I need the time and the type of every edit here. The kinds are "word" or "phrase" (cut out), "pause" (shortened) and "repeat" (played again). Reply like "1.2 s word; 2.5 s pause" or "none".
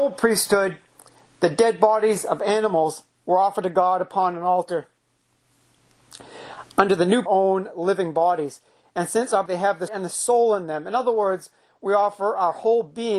7.3 s phrase; 9.5 s phrase; 9.9 s word